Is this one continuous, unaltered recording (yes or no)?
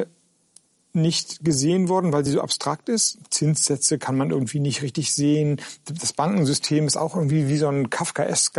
yes